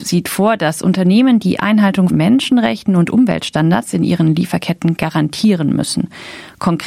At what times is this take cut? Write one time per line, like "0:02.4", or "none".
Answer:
0:02.1